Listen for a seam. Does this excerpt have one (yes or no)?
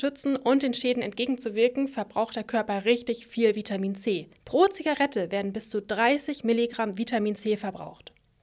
yes